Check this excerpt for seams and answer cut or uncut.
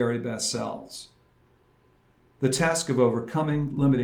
uncut